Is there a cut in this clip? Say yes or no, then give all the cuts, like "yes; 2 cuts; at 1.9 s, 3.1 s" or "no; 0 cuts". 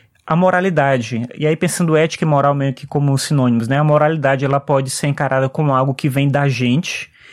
no; 0 cuts